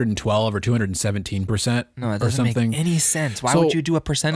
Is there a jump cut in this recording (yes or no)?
no